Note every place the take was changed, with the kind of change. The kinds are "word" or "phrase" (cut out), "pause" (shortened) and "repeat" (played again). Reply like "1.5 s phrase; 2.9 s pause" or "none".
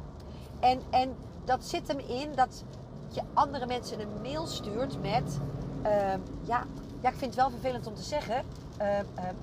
3.1 s phrase; 7.0 s word